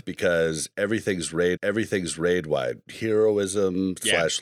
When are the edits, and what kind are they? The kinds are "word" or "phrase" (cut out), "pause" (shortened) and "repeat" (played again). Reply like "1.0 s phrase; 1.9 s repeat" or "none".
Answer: 1.6 s repeat

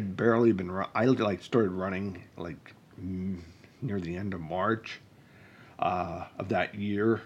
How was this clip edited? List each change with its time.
none

